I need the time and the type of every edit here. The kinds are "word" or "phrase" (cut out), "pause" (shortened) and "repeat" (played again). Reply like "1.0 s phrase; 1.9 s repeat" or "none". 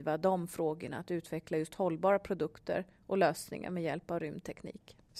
none

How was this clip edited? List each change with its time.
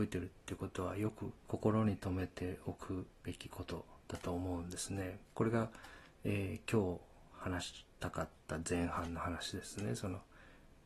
1.4 s pause; 3.2 s pause; 5.2 s pause

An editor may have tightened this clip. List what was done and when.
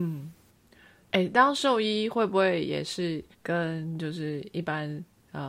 3.3 s pause

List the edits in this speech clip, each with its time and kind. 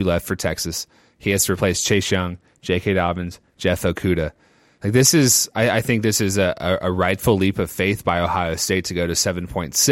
none

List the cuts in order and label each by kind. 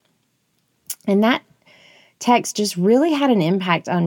none

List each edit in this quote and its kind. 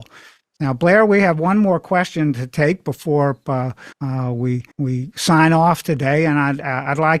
3.9 s pause; 4.7 s pause

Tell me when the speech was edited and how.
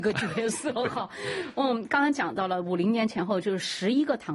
none

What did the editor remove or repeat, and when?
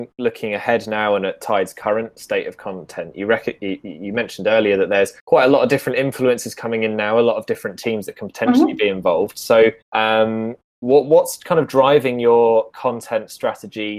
5.2 s pause; 9.8 s pause

